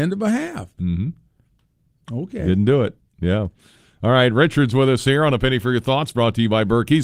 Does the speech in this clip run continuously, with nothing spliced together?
yes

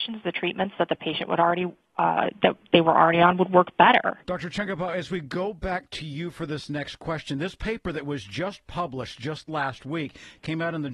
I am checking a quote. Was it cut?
yes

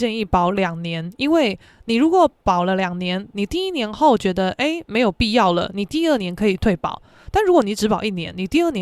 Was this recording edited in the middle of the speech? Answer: no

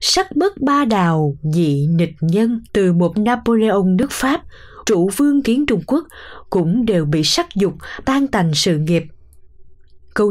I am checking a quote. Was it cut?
yes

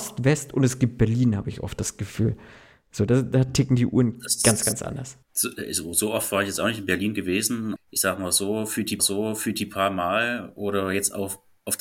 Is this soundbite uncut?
no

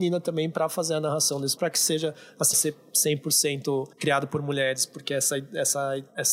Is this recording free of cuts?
no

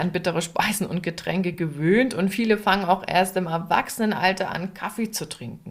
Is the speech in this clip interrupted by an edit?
no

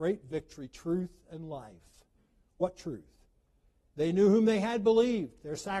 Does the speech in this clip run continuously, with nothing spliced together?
yes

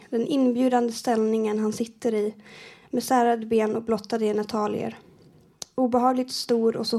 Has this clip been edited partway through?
no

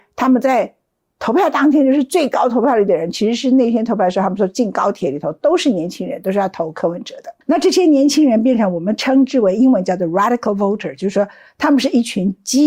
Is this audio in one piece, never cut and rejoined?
no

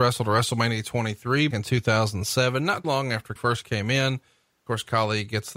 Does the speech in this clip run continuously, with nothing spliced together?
no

